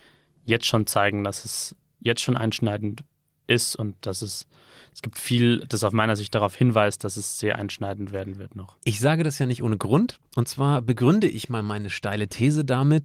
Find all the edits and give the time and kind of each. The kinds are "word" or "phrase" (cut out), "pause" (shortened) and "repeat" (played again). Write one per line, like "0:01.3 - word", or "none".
none